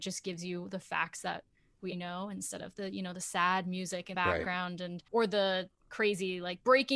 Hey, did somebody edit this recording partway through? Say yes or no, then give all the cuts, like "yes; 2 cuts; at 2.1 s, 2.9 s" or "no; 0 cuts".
yes; 3 cuts; at 1.9 s, 4.1 s, 5.1 s